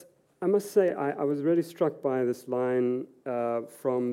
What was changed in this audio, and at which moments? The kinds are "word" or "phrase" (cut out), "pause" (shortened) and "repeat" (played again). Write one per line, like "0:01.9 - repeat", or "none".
0:00.9 - word